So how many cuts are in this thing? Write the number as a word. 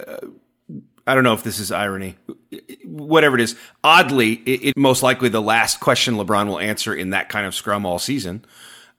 one